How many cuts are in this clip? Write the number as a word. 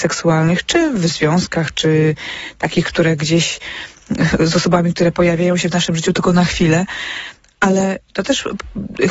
zero